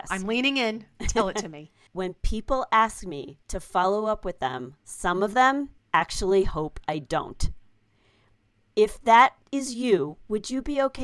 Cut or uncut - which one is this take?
cut